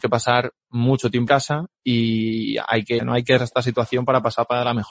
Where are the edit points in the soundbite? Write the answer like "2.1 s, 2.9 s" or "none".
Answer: 1.3 s, 3.0 s, 3.4 s